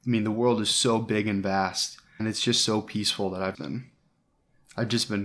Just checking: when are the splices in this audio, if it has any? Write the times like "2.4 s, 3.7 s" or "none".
2.2 s, 3.5 s